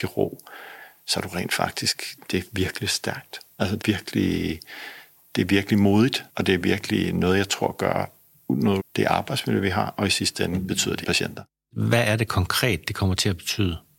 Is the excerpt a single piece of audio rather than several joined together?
no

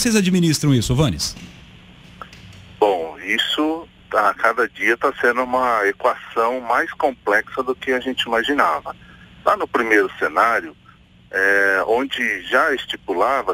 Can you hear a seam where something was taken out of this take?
no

